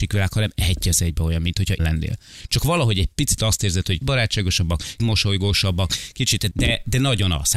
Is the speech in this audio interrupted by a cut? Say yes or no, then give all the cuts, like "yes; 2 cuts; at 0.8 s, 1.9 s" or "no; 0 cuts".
yes; 5 cuts; at 1.8 s, 3.1 s, 4.0 s, 5.0 s, 6.5 s